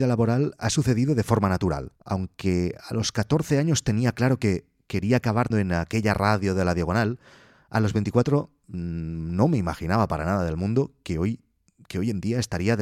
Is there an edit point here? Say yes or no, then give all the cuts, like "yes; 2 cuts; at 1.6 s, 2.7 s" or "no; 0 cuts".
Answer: yes; 2 cuts; at 1.9 s, 5.5 s